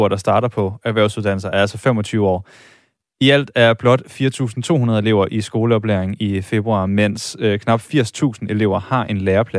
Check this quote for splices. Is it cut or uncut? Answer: uncut